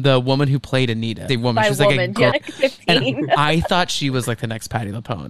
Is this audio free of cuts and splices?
no; 2 cuts; at 1.3 s, 2.3 s

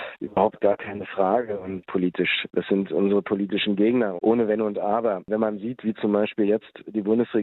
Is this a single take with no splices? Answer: no; 2 cuts; at 1.8 s, 4.2 s

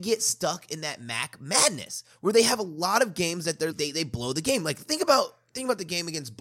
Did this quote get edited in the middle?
yes; 1 cut; at 3.7 s

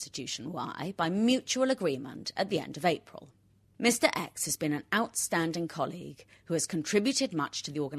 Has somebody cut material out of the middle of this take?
no; 0 cuts

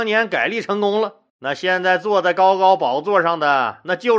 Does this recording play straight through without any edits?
no; 1 cut; at 1.3 s

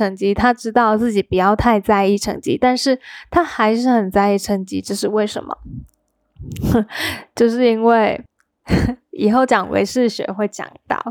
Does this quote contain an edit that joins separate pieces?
yes; 1 cut; at 8.3 s

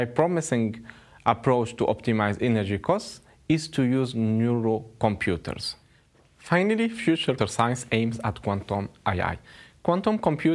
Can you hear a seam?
yes; 1 cut; at 7.4 s

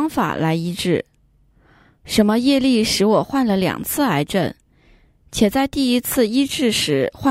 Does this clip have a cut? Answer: no; 0 cuts

